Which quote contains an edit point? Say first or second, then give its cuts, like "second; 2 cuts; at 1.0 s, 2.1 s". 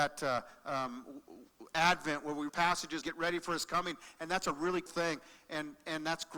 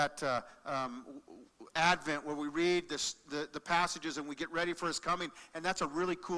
first; 3 cuts; at 2.5 s, 3.0 s, 4.9 s